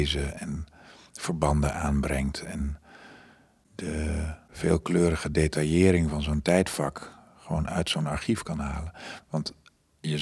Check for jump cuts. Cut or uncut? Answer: uncut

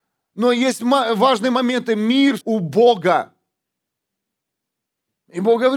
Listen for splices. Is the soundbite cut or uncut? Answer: cut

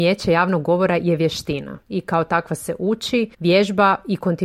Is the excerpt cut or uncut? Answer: cut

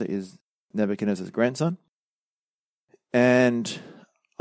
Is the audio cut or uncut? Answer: uncut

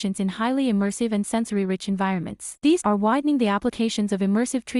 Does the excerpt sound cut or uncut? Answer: cut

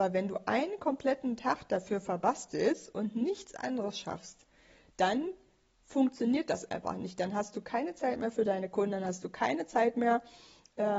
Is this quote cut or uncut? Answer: uncut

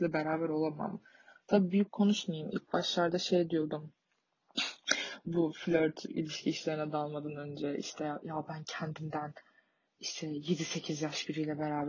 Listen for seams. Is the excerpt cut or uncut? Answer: uncut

